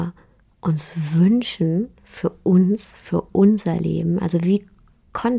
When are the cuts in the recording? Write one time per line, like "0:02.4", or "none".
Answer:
0:02.0